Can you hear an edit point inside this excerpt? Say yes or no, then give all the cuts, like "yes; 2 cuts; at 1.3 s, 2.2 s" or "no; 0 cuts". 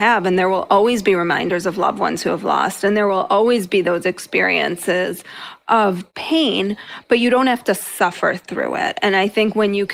no; 0 cuts